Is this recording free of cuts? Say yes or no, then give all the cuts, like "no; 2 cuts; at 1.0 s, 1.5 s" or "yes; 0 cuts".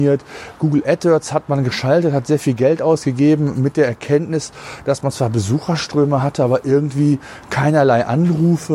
yes; 0 cuts